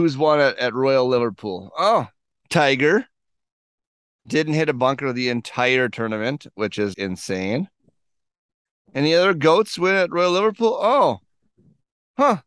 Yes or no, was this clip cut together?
yes